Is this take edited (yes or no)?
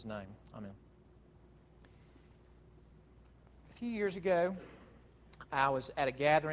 no